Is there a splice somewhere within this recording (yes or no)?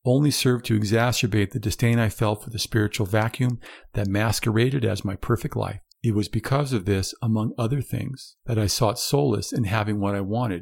yes